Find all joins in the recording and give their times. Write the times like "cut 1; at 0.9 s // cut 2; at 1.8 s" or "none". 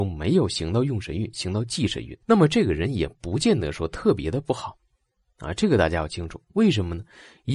cut 1; at 2.2 s

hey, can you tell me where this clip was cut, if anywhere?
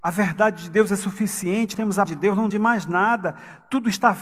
cut 1; at 1.7 s // cut 2; at 2.0 s // cut 3; at 2.5 s

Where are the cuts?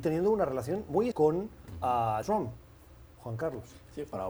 cut 1; at 1.1 s // cut 2; at 2.2 s

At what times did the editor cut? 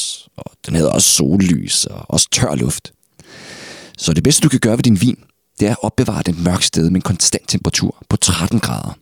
none

